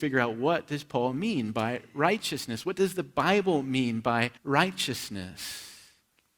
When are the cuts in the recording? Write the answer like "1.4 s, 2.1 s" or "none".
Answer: 4.4 s